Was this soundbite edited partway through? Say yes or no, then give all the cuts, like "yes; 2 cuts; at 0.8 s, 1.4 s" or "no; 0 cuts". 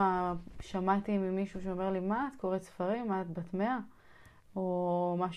no; 0 cuts